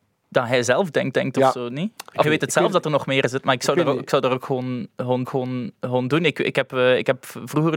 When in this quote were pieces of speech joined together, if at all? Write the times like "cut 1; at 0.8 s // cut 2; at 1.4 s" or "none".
cut 1; at 1.1 s // cut 2; at 2.2 s // cut 3; at 5.2 s